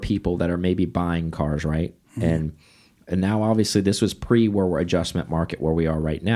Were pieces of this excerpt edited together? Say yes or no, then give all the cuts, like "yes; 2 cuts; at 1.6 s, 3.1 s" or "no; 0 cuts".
no; 0 cuts